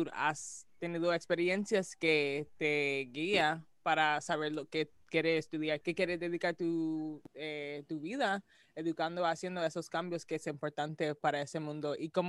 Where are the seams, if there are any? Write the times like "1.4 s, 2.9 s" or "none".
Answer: 7.3 s